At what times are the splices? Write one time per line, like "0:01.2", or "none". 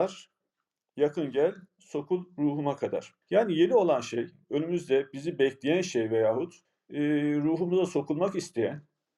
0:03.2
0:06.6